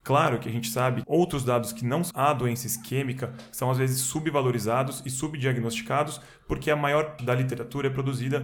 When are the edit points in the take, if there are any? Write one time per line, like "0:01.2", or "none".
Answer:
0:01.0
0:02.1
0:07.2